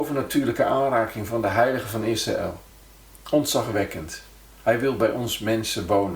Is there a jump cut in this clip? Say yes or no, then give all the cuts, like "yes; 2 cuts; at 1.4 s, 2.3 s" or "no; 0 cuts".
no; 0 cuts